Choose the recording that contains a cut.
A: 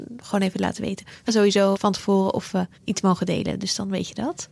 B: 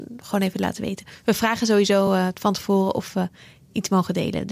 A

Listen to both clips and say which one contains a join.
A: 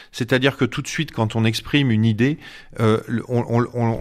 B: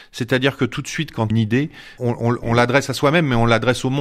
B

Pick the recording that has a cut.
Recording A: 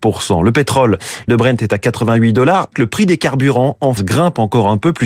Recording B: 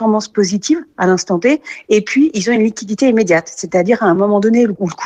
A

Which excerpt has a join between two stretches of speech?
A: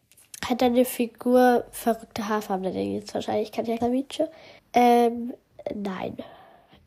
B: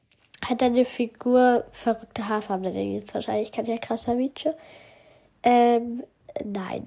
A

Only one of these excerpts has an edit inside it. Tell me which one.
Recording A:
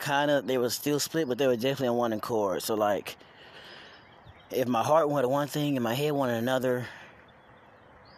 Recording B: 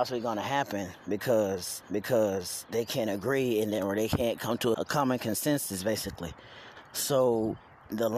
B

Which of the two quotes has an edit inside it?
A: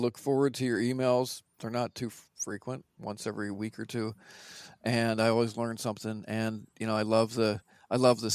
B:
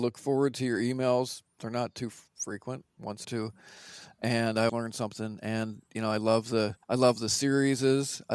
B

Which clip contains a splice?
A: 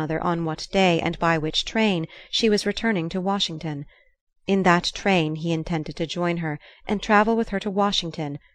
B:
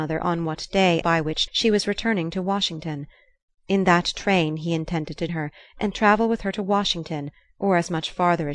B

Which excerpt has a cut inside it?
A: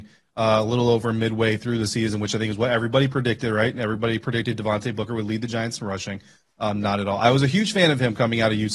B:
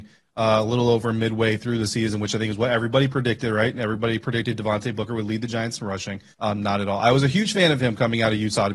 B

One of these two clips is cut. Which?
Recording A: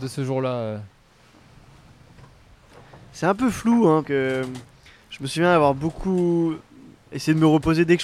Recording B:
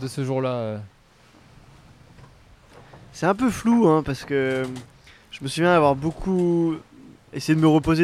A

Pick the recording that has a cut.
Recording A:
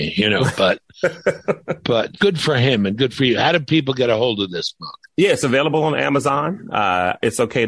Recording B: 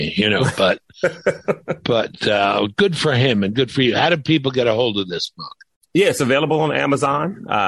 A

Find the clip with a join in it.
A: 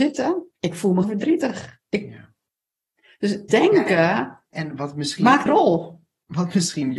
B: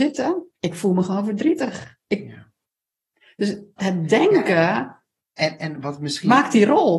A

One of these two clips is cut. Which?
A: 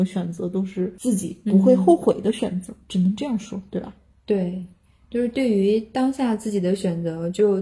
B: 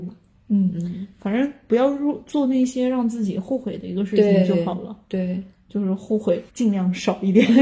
B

